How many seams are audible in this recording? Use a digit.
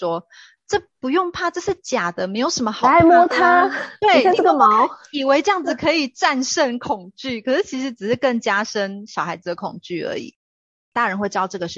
0